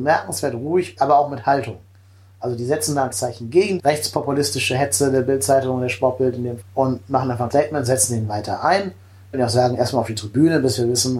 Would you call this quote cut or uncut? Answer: cut